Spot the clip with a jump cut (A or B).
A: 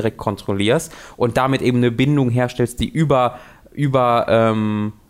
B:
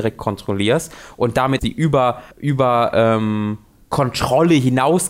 B